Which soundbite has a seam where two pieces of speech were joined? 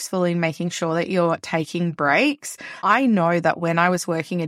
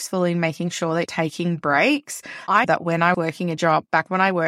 second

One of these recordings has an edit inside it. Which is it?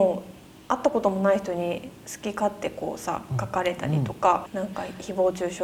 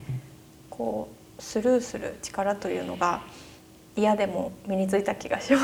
first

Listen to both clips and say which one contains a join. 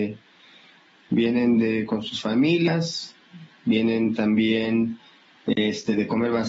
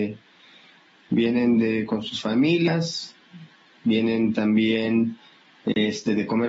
first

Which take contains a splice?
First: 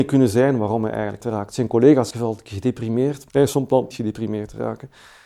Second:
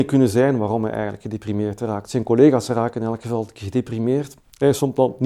first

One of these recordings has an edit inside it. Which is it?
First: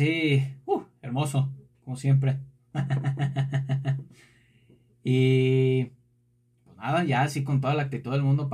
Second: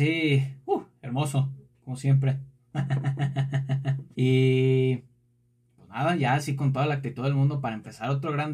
second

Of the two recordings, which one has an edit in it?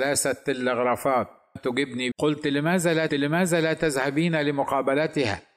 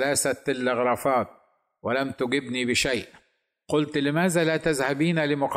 first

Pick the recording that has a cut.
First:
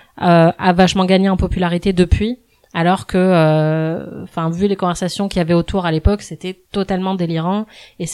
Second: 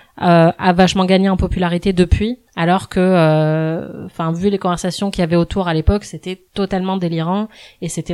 second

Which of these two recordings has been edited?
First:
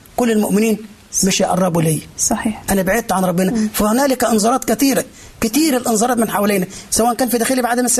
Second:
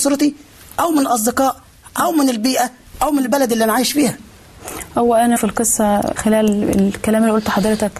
second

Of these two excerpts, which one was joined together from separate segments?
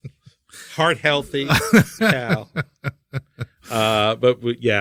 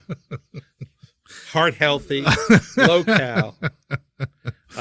first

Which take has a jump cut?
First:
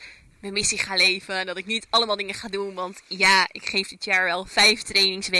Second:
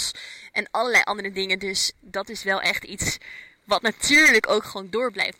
second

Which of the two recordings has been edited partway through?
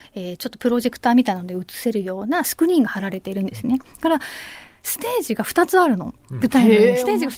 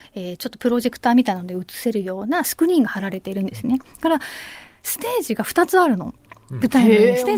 first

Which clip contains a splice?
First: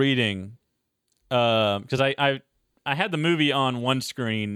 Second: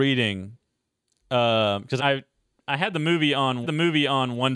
second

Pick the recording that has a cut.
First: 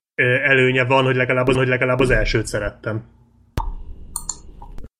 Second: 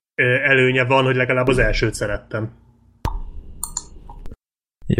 first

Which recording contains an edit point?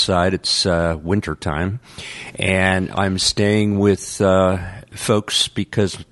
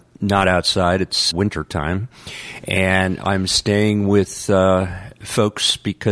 second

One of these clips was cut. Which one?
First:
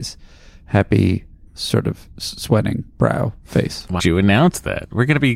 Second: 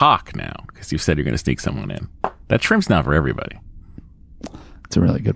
first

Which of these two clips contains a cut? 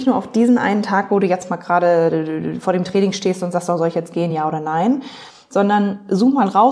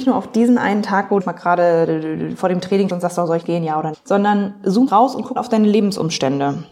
second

